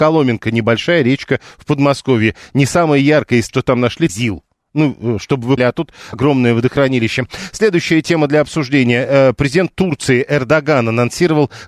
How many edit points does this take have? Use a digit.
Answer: 4